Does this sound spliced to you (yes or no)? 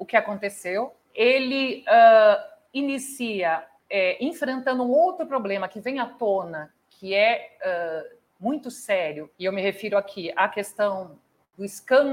yes